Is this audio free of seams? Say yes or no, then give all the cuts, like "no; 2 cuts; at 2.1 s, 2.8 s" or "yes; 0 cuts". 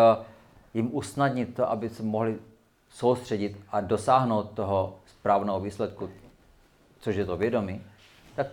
yes; 0 cuts